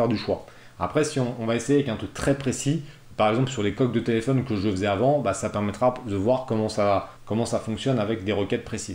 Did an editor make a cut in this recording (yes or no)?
yes